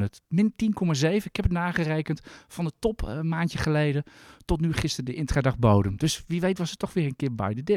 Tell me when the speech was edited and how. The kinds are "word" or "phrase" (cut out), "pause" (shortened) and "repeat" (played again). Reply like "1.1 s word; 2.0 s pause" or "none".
none